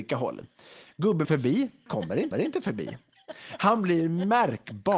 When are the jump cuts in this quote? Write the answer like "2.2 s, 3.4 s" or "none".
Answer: 1.2 s, 1.9 s, 2.3 s